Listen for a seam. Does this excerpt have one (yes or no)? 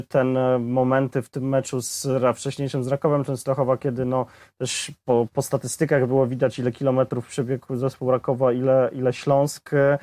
no